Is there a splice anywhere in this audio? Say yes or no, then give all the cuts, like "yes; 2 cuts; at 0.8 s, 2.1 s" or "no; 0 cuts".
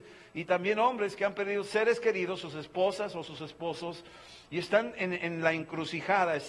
no; 0 cuts